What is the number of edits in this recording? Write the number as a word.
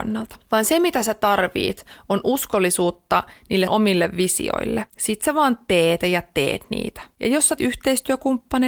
four